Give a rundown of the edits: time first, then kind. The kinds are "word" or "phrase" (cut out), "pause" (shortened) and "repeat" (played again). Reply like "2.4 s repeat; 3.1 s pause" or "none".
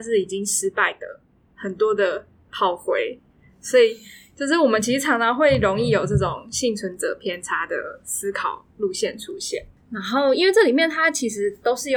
none

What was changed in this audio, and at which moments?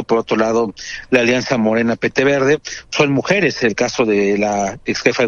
none

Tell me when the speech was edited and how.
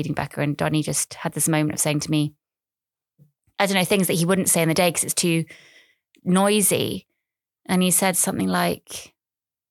none

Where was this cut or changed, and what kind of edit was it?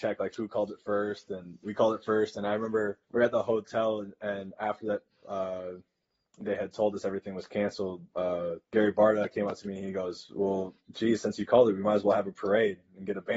1.6 s word; 3.0 s pause; 8.6 s pause

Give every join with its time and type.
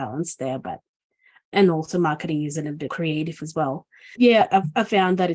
1.5 s word; 2.9 s word; 4.2 s word

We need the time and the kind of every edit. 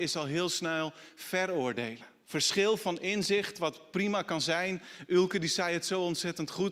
2.2 s pause

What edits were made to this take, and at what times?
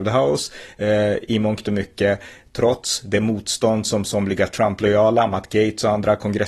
none

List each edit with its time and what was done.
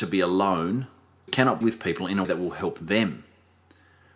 1.3 s word; 1.6 s word; 2.2 s word

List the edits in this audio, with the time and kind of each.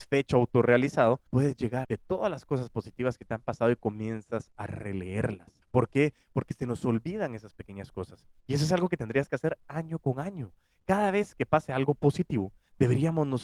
1.3 s pause; 1.8 s phrase; 5.6 s pause

